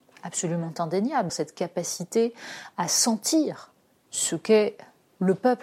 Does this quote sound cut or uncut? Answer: cut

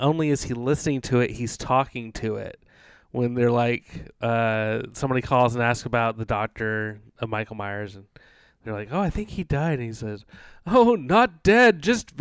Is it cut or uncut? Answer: uncut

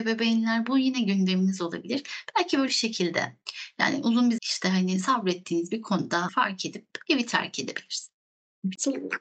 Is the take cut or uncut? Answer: cut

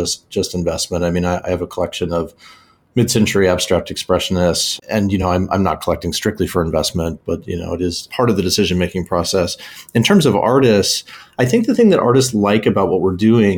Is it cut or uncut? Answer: uncut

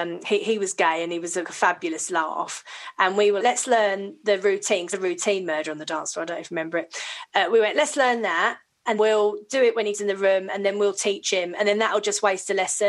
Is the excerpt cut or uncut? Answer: cut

